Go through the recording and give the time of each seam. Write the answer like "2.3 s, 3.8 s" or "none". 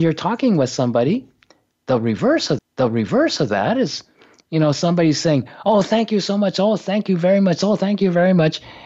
2.6 s